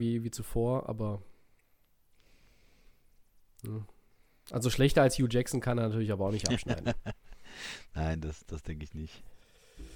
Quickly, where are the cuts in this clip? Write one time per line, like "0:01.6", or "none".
none